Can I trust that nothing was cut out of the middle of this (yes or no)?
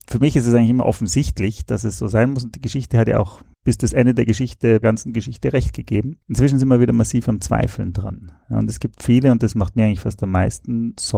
no